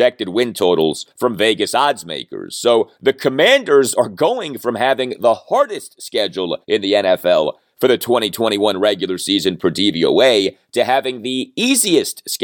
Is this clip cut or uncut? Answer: cut